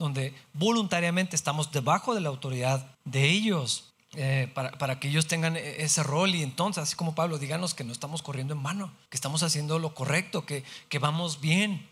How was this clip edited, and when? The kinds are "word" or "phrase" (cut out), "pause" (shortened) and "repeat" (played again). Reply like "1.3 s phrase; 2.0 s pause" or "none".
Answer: 2.9 s pause; 3.9 s pause; 9.1 s pause